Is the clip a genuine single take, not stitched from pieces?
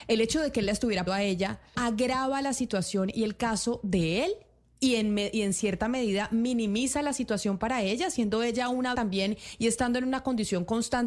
no; 3 cuts; at 1.1 s, 1.7 s, 8.9 s

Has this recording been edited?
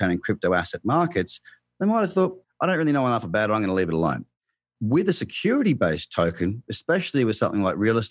yes; 1 cut; at 2.4 s

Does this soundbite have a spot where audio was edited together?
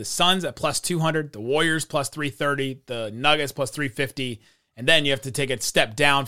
no; 0 cuts

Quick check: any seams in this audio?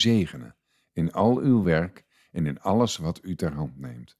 no; 0 cuts

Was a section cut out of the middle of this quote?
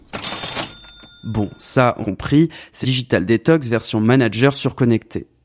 yes; 2 cuts; at 2.0 s, 2.8 s

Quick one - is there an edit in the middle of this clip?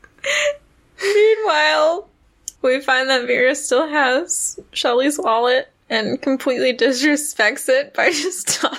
yes; 2 cuts; at 2.6 s, 5.8 s

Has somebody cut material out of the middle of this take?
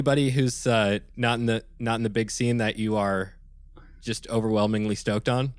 no; 0 cuts

